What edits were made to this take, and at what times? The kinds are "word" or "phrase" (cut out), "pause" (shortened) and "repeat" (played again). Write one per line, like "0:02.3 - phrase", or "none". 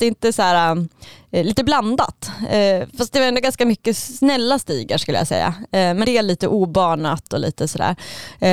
0:06.0 - word